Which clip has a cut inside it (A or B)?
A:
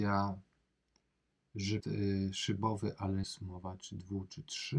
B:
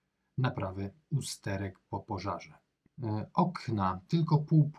A